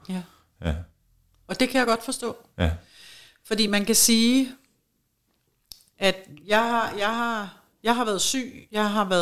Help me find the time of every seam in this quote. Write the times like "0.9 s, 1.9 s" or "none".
none